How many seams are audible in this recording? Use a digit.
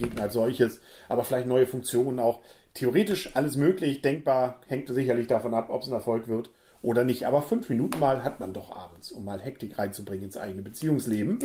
0